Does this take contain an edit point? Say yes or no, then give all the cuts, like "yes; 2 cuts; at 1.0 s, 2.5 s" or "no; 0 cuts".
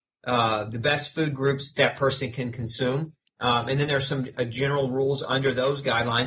no; 0 cuts